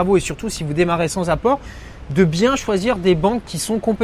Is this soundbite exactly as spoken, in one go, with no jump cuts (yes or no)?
yes